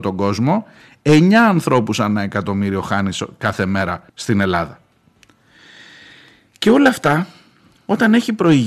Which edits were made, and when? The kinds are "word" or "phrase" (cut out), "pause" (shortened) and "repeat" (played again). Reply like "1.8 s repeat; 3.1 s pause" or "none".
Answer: 4.1 s pause